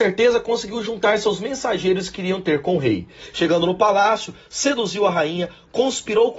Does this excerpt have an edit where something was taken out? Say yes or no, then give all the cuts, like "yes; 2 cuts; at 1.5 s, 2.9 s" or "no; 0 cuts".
no; 0 cuts